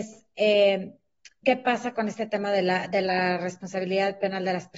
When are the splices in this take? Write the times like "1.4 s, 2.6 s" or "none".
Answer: 1.4 s